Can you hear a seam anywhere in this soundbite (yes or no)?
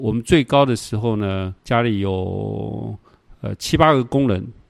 yes